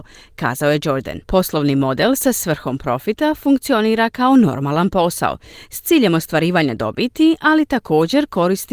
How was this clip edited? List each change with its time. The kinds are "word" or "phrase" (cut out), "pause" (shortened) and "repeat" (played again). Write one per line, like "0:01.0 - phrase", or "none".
0:01.2 - pause